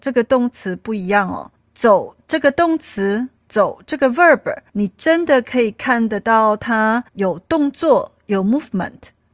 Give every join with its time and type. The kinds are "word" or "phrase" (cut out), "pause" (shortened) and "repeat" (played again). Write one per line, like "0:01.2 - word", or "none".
0:01.6 - pause
0:03.4 - pause
0:04.7 - pause
0:07.1 - pause